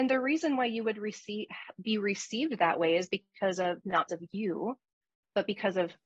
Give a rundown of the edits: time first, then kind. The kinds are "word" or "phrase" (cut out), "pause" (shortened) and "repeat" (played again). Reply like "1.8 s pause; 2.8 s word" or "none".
4.1 s word

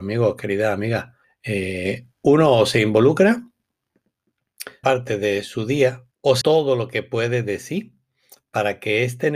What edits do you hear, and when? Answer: 1.2 s pause; 4.8 s phrase; 6.1 s pause; 6.4 s phrase

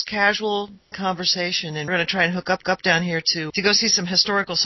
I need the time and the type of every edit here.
0.9 s word; 1.9 s word; 2.6 s repeat; 3.5 s word

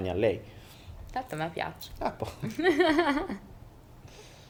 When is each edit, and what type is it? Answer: none

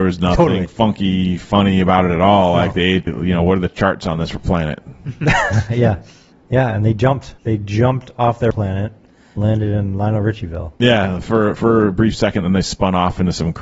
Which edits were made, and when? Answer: 3.1 s phrase; 6.3 s pause; 7.4 s pause; 8.5 s word; 9.4 s word; 11.6 s word

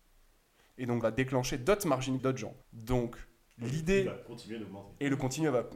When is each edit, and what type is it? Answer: 1.0 s word; 2.2 s phrase; 2.6 s pause

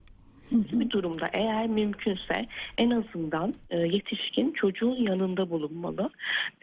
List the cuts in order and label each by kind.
none

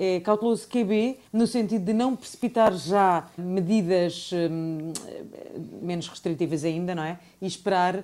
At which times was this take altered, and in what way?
1.3 s pause; 3.4 s word; 5.8 s word

